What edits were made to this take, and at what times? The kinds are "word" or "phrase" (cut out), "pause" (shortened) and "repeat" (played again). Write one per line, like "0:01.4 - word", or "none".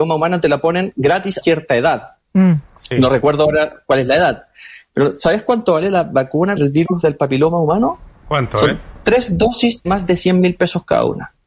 0:01.4 - word
0:06.6 - word
0:09.8 - word